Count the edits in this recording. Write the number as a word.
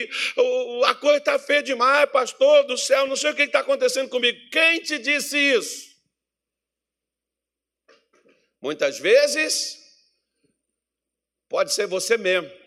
zero